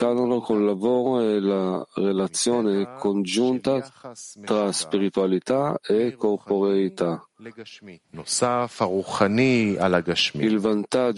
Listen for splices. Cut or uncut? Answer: cut